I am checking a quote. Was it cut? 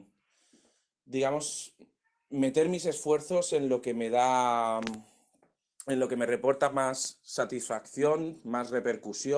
no; 0 cuts

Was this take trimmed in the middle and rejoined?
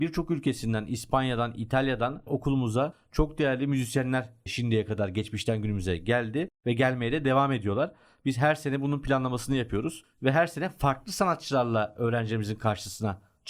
no; 0 cuts

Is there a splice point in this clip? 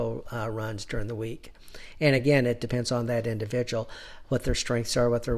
no; 0 cuts

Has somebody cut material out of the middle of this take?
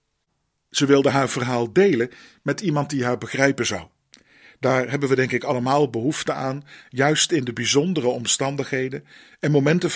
no; 0 cuts

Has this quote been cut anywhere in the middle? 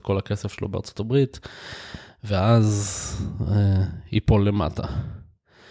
no; 0 cuts

